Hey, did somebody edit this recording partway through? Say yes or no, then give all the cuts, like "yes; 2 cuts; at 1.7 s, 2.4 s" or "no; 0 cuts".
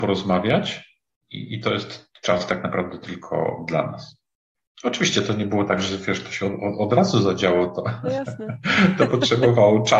no; 0 cuts